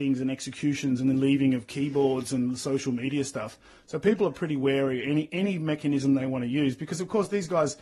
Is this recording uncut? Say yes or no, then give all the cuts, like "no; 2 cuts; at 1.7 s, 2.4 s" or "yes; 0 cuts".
yes; 0 cuts